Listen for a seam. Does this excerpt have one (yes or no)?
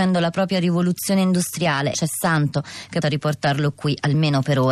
yes